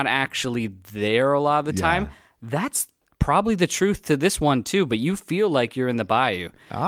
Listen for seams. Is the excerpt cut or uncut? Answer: uncut